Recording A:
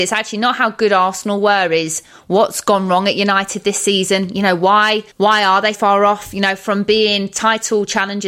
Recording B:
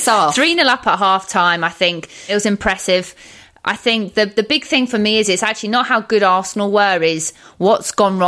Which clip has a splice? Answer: A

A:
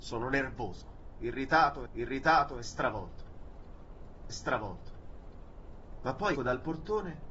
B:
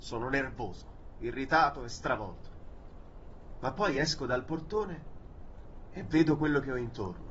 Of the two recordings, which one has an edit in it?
A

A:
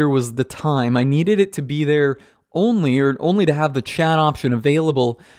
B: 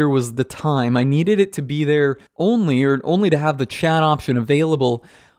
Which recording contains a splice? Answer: B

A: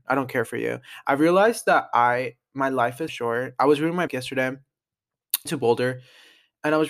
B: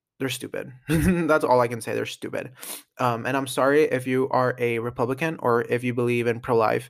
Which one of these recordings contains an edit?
A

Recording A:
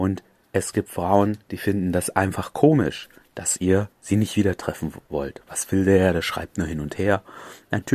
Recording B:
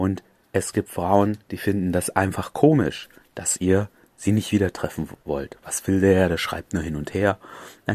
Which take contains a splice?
A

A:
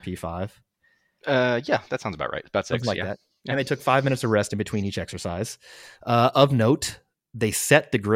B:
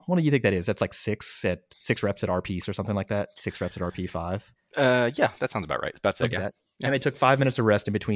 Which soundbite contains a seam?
B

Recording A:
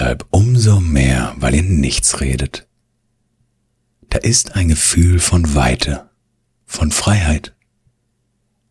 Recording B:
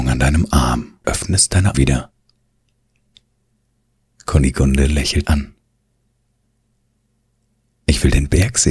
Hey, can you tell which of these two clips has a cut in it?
B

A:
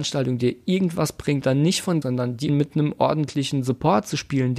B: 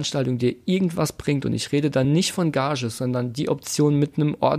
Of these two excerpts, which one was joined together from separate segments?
A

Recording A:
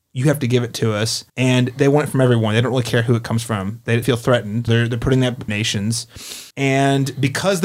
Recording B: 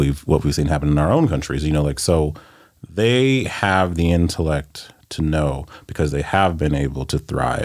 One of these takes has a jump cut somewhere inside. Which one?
A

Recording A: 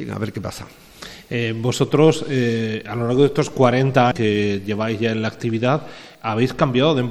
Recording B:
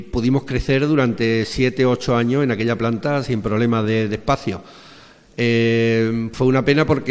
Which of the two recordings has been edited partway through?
A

